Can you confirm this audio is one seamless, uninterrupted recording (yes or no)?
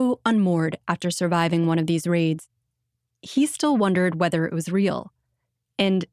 yes